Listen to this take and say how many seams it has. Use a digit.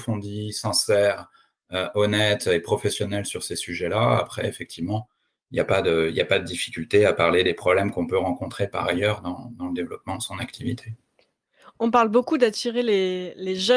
0